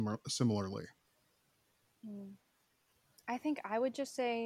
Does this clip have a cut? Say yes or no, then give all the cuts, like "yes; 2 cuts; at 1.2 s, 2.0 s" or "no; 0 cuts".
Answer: no; 0 cuts